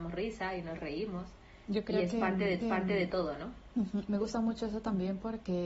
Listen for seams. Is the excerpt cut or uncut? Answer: cut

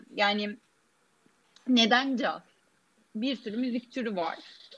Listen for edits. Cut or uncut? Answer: uncut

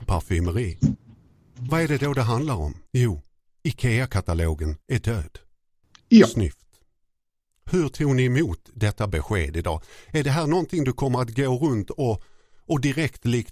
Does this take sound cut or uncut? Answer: cut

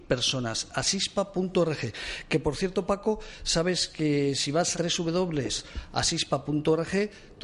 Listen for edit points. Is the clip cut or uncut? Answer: cut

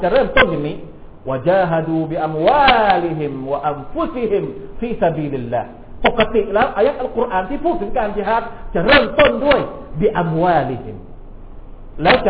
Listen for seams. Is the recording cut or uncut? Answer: uncut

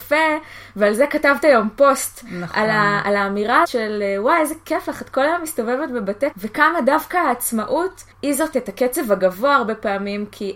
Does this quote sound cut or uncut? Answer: cut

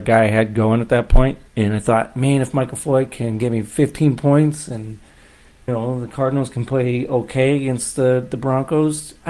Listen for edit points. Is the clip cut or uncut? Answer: cut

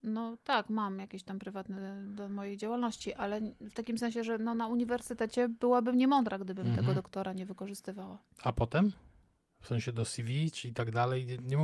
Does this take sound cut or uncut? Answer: uncut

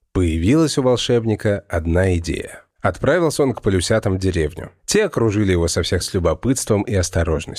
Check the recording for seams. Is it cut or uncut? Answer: cut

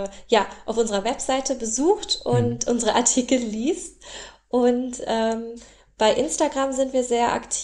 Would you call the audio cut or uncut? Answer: uncut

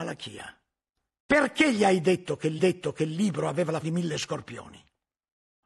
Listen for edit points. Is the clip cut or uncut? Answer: cut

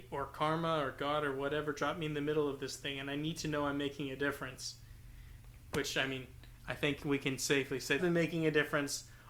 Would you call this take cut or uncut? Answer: cut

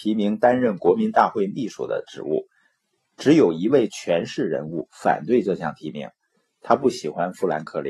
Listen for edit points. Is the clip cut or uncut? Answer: uncut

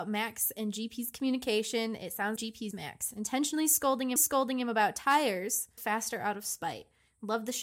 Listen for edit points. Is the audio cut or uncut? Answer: cut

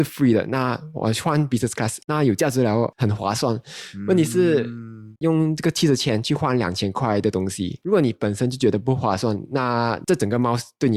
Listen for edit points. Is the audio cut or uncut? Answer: cut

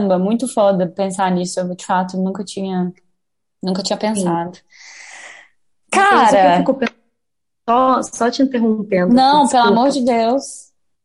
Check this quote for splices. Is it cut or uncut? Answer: uncut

